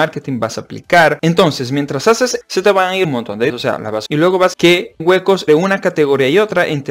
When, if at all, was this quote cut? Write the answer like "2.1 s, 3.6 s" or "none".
2.4 s, 3.0 s, 3.5 s, 4.1 s, 4.5 s, 5.0 s, 5.5 s